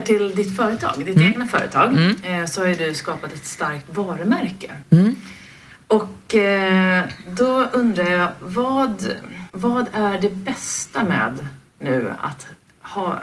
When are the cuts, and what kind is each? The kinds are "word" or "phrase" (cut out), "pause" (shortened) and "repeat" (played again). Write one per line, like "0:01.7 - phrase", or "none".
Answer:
0:09.5 - pause